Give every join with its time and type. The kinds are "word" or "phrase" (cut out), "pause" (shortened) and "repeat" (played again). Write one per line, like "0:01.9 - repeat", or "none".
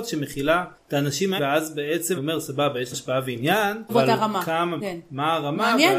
0:01.4 - word
0:02.2 - word
0:02.9 - word
0:03.9 - word
0:04.8 - word